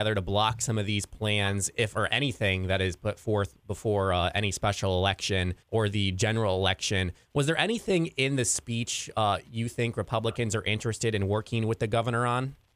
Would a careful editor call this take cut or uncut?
cut